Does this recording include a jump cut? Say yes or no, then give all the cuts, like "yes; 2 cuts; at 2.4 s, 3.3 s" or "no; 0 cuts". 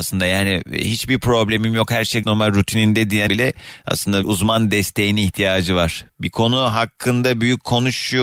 yes; 3 cuts; at 2.2 s, 3.3 s, 4.2 s